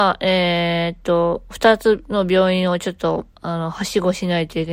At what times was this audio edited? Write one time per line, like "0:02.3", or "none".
0:03.3